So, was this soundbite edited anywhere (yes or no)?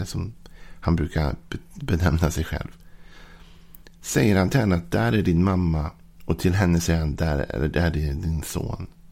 no